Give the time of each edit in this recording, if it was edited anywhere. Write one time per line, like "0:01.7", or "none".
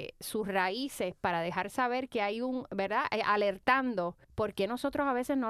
0:04.2